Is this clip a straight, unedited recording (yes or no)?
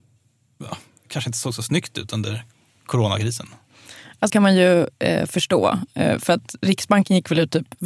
no